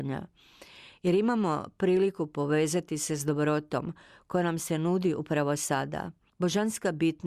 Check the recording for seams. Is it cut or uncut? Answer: uncut